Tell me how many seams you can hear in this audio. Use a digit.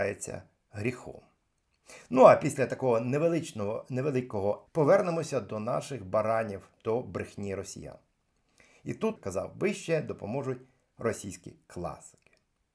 3